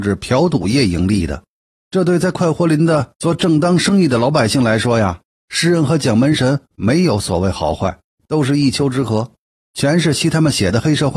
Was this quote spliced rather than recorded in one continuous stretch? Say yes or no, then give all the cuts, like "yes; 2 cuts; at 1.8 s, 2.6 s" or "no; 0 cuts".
no; 0 cuts